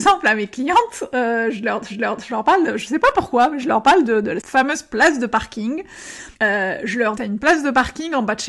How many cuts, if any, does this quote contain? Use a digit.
4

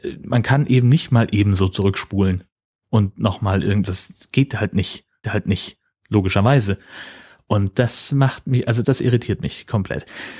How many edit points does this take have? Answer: 2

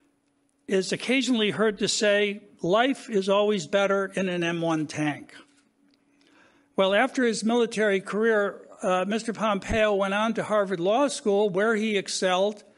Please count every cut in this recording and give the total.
0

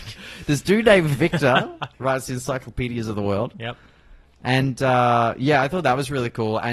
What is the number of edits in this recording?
1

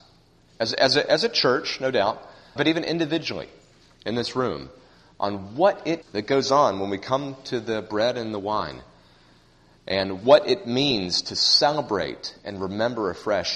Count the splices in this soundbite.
2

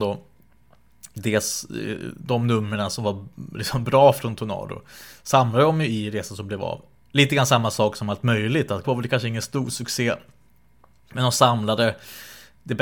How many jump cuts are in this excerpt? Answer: 1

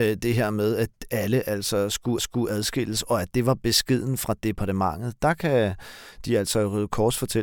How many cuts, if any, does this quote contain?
1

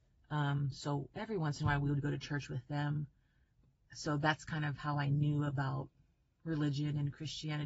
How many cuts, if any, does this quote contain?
0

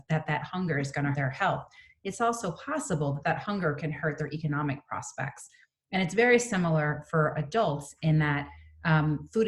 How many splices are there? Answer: 1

